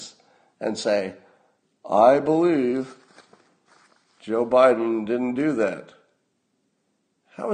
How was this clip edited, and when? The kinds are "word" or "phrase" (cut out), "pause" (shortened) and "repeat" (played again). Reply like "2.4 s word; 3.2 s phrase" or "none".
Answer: none